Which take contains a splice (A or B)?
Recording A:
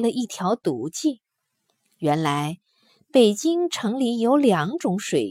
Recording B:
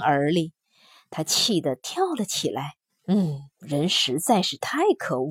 B